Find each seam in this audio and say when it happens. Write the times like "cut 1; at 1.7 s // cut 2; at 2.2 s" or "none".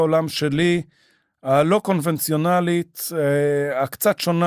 none